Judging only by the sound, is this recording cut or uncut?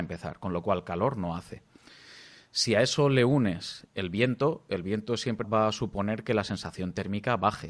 cut